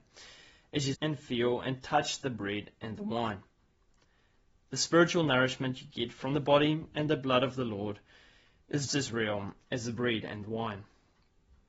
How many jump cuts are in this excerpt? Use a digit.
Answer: 2